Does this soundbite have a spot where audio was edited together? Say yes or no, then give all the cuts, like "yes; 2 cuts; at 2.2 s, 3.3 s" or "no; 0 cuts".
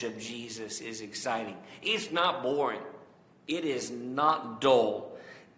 no; 0 cuts